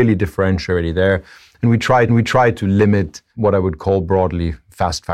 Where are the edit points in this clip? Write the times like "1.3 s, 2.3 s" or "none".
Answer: 2.1 s, 3.3 s